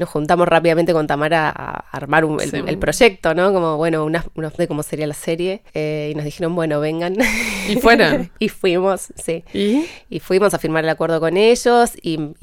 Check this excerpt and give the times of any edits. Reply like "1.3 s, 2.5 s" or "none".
1.5 s, 4.6 s, 5.7 s